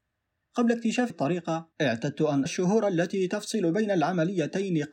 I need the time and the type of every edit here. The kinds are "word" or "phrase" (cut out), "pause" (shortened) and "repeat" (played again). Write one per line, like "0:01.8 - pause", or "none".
0:01.1 - word
0:01.7 - pause
0:02.5 - word